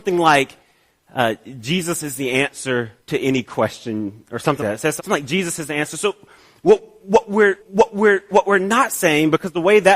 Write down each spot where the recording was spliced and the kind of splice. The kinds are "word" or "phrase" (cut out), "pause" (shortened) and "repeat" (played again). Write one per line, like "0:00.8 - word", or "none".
0:03.0 - pause
0:04.6 - word
0:05.0 - word
0:07.6 - repeat